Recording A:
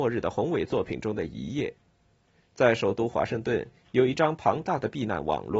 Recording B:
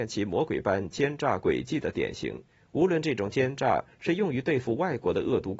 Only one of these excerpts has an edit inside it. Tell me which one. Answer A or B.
B